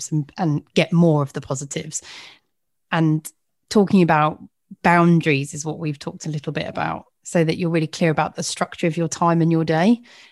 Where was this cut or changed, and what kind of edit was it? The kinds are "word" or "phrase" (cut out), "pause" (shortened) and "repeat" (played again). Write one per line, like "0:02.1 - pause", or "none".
none